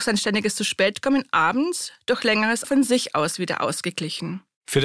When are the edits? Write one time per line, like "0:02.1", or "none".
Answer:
0:02.6